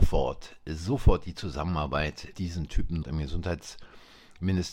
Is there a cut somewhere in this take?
yes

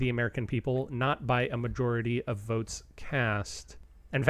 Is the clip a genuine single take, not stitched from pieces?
yes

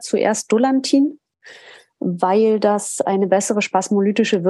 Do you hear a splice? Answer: no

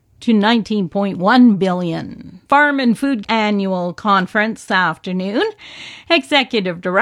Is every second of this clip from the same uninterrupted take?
no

